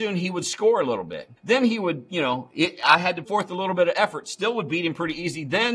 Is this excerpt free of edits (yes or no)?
no